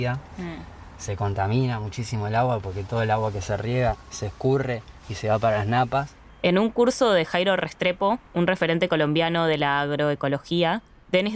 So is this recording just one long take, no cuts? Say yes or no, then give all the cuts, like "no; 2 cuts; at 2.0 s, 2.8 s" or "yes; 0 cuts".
no; 1 cut; at 8.3 s